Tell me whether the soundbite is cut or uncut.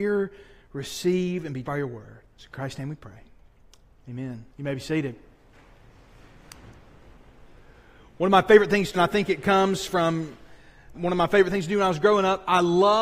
cut